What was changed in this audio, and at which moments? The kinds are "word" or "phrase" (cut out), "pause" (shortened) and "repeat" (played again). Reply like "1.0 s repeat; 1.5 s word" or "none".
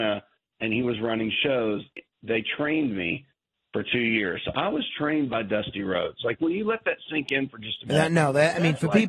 2.1 s pause